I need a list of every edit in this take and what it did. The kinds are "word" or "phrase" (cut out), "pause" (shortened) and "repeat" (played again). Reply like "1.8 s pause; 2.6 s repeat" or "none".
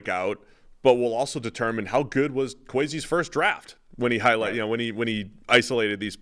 none